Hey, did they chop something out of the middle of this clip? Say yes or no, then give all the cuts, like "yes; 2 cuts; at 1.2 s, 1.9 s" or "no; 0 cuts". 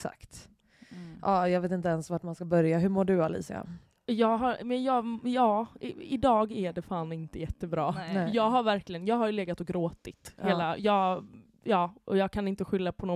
no; 0 cuts